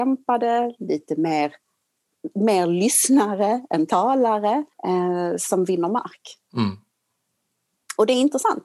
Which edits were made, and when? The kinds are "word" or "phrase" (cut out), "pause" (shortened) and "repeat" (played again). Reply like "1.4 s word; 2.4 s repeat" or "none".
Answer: 4.7 s pause; 6.4 s pause